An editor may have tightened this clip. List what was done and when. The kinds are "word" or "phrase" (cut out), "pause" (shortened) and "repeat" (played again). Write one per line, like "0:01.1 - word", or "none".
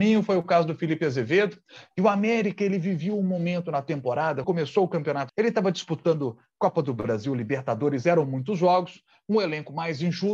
0:04.4 - word
0:05.3 - word